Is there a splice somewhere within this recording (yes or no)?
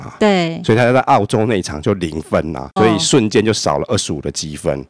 yes